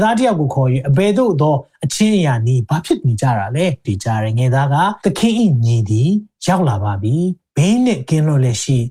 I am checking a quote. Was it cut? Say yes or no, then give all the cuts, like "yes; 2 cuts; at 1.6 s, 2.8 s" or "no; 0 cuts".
yes; 2 cuts; at 3.8 s, 5.0 s